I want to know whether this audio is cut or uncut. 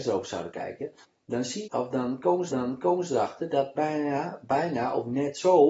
cut